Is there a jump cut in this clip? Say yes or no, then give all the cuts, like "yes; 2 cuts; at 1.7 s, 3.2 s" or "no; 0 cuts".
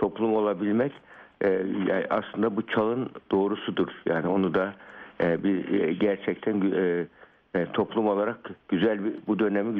no; 0 cuts